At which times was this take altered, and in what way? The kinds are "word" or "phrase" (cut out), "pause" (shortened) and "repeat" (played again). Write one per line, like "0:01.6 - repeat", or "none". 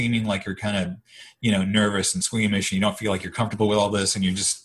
none